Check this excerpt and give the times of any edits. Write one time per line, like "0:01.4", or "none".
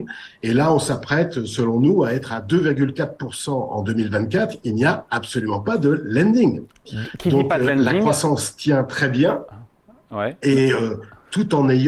none